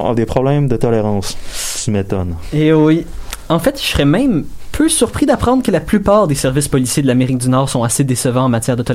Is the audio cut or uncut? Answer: uncut